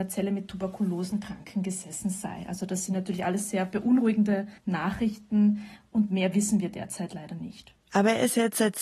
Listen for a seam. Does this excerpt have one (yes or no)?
yes